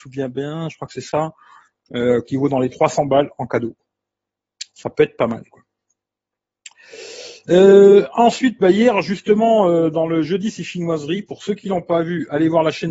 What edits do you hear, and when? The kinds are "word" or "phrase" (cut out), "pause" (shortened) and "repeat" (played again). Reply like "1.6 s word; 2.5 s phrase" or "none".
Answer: none